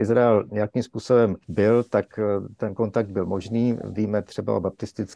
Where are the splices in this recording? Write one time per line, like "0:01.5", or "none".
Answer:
0:01.4